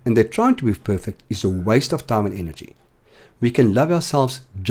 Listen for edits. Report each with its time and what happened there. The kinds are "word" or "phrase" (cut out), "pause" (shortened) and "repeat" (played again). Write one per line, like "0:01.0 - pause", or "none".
none